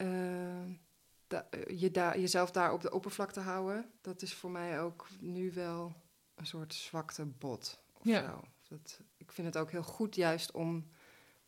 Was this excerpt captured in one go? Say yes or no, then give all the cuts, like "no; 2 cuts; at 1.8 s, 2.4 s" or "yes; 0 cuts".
no; 3 cuts; at 4.0 s, 6.1 s, 9.1 s